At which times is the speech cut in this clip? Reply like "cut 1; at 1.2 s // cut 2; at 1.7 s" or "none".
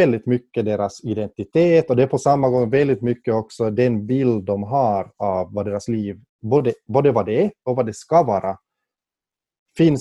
cut 1; at 6.3 s